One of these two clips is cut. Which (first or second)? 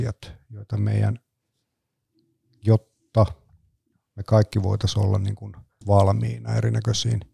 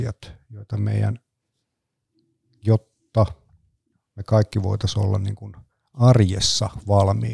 first